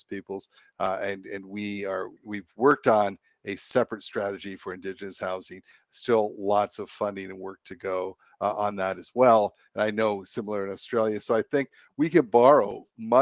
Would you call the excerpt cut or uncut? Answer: cut